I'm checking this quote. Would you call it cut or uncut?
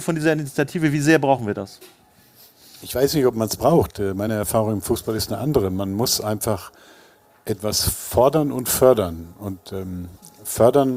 uncut